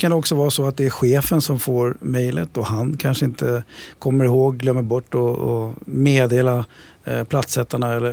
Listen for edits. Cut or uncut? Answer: uncut